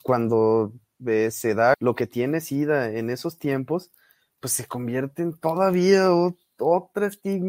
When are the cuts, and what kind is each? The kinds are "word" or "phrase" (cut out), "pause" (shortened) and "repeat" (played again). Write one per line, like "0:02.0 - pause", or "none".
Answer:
0:01.7 - phrase